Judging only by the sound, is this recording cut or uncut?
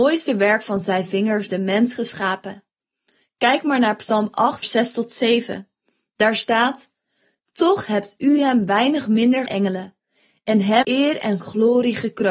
cut